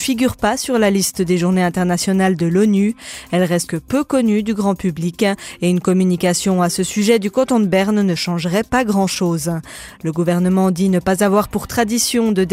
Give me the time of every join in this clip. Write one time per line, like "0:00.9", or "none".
0:03.7